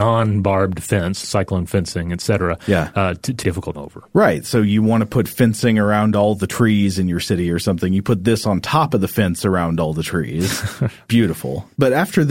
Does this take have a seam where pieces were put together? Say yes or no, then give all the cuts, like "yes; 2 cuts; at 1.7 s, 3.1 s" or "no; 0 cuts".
yes; 3 cuts; at 1.2 s, 3.4 s, 3.7 s